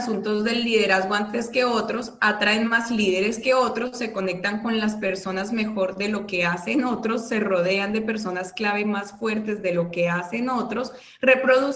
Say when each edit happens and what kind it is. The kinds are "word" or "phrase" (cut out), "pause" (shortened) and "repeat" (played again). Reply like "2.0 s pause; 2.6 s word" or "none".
none